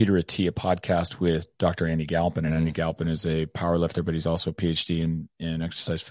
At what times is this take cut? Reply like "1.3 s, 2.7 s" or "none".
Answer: none